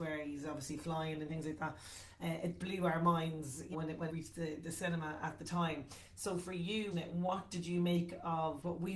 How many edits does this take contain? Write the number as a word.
five